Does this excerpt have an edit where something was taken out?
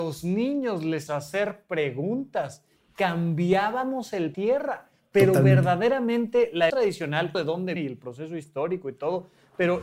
yes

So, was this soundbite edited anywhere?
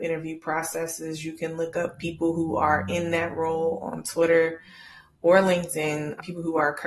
no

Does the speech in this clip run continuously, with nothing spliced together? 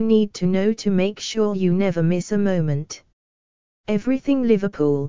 yes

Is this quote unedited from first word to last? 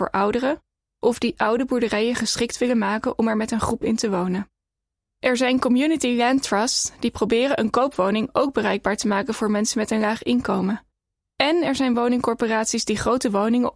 yes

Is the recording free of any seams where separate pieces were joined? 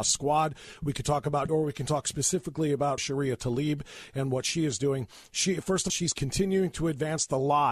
no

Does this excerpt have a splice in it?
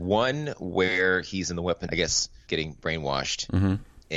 yes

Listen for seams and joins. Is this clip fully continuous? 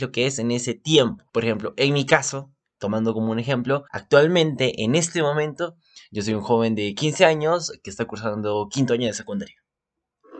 no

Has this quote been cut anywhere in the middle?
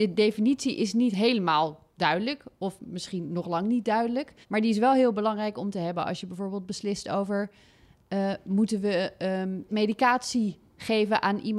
yes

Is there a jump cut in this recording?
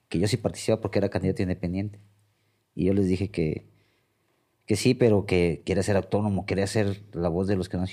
no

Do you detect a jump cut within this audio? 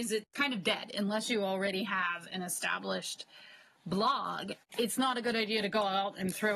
no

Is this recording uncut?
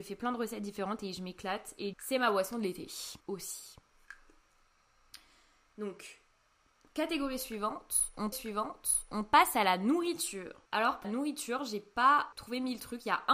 no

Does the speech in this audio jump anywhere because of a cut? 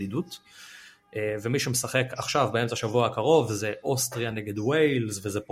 no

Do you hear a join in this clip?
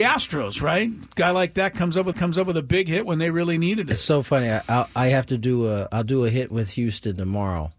yes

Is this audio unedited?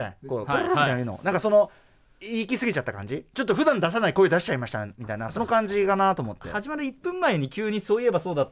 yes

